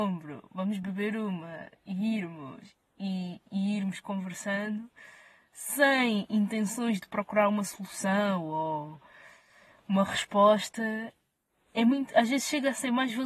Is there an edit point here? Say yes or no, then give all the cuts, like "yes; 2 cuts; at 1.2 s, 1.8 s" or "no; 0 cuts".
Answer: no; 0 cuts